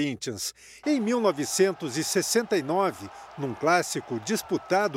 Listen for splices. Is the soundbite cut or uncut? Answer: uncut